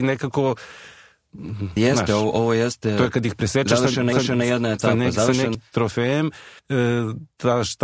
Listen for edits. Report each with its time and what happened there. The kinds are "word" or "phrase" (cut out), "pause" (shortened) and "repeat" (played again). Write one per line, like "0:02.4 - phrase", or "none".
0:01.8 - word
0:04.1 - repeat
0:05.5 - word
0:06.6 - pause